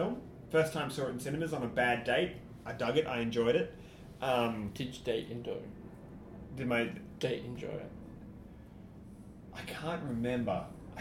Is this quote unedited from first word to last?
yes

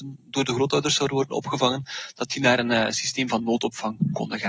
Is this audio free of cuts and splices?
yes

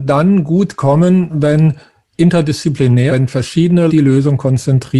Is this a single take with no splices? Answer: no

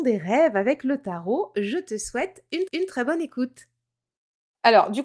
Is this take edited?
yes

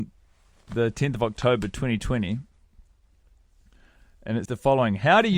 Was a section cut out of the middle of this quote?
yes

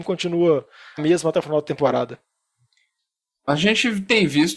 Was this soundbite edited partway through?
yes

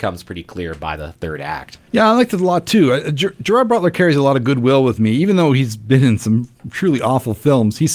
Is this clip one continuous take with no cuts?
no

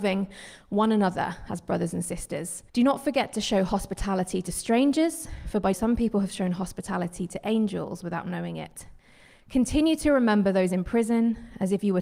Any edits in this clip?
yes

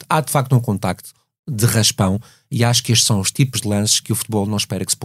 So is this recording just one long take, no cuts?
yes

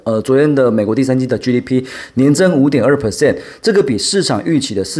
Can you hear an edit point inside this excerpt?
no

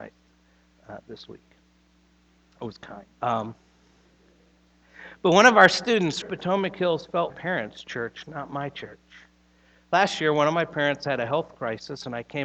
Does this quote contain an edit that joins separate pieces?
yes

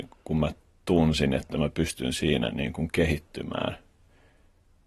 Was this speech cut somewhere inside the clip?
no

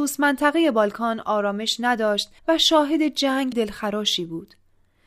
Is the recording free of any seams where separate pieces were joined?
no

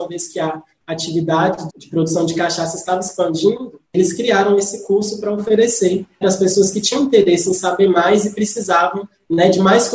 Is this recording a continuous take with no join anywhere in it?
no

